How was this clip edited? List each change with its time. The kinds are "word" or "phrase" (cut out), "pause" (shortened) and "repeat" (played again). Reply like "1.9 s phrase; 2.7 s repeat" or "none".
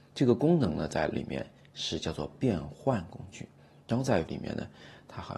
1.1 s word; 4.3 s word